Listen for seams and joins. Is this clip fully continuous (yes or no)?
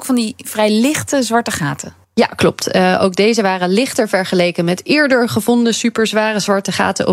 no